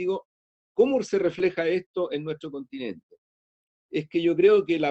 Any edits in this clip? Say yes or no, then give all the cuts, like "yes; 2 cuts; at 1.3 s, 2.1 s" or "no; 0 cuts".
no; 0 cuts